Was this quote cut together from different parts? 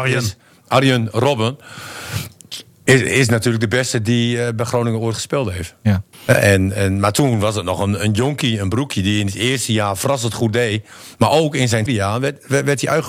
yes; 2 cuts; at 6.1 s, 11.9 s

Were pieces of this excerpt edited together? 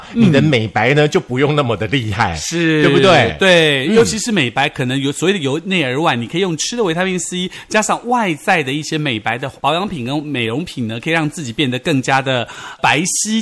no; 0 cuts

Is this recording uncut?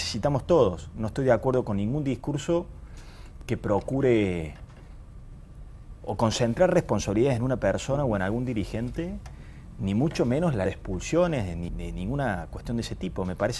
no; 2 cuts; at 10.7 s, 11.7 s

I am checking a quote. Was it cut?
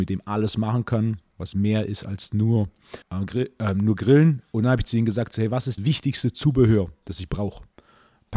yes; 2 cuts; at 3.0 s, 5.8 s

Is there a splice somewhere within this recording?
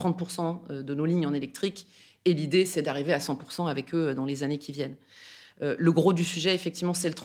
no; 0 cuts

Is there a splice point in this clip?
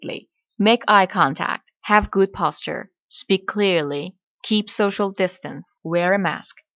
no; 0 cuts

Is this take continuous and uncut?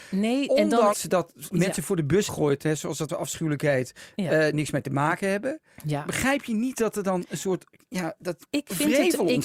no; 6 cuts; at 0.9 s, 1.5 s, 2.3 s, 3.1 s, 4.5 s, 7.7 s

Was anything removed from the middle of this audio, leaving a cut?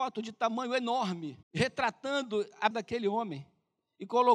yes; 2 cuts; at 1.4 s, 2.7 s

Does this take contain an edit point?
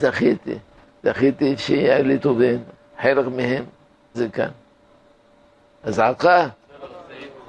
yes; 3 cuts; at 2.2 s, 2.7 s, 4.1 s

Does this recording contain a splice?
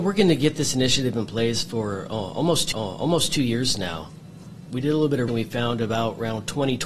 yes; 3 cuts; at 2.7 s, 4.7 s, 5.3 s

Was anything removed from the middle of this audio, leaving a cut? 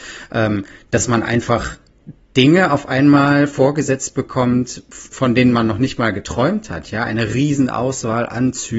no; 0 cuts

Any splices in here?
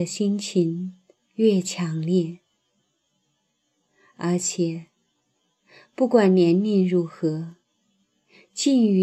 yes; 1 cut; at 1.2 s

